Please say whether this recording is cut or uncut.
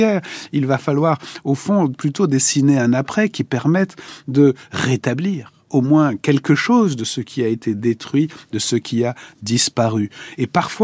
uncut